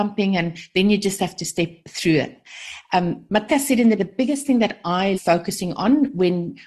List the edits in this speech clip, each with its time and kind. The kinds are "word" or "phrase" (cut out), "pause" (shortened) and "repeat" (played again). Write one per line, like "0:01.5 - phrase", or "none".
0:03.5 - word
0:04.0 - word
0:05.1 - word